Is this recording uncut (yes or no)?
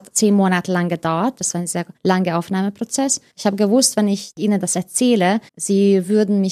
no